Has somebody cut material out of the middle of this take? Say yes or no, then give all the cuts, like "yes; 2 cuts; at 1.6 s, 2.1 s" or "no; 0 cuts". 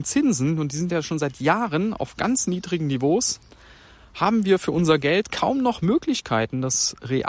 no; 0 cuts